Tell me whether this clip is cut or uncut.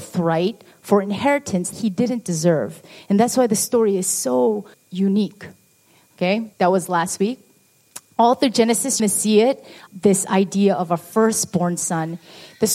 cut